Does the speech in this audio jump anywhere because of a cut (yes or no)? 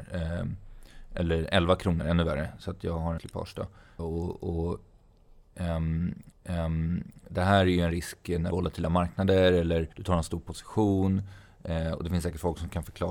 yes